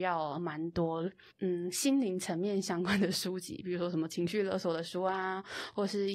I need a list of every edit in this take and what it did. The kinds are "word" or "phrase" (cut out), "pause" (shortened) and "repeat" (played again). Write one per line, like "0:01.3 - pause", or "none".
0:01.3 - pause